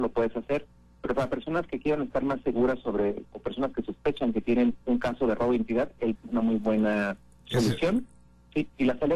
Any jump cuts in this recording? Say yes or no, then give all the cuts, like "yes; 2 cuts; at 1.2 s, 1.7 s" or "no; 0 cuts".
yes; 3 cuts; at 3.2 s, 4.8 s, 6.1 s